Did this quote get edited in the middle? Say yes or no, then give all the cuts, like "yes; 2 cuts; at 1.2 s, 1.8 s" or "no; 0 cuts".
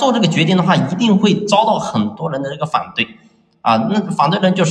no; 0 cuts